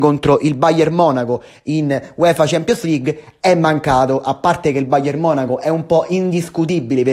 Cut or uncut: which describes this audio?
uncut